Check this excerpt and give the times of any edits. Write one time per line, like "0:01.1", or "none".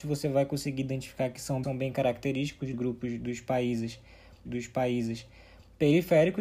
0:01.6
0:02.7
0:04.5

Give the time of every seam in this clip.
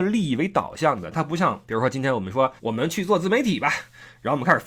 0:01.6
0:02.6

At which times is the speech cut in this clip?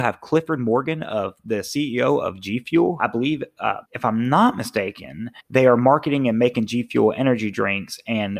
0:03.0
0:03.8
0:05.4

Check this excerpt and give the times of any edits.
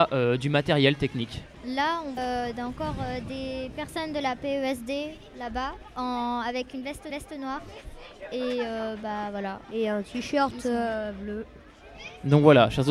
0:02.2
0:07.1
0:09.6

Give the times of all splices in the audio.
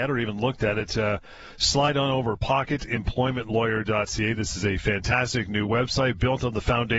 none

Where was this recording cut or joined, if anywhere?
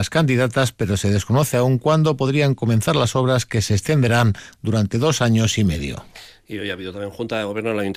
none

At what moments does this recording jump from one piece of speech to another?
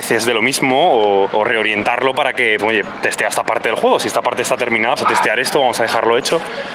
0:01.3
0:02.6
0:05.0

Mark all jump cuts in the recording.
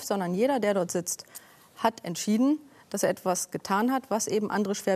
none

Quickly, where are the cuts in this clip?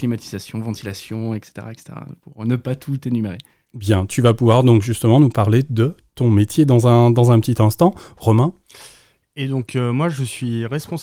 none

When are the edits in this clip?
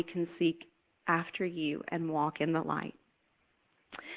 none

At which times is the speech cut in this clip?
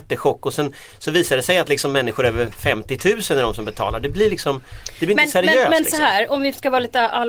none

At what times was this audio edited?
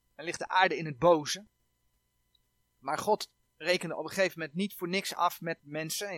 none

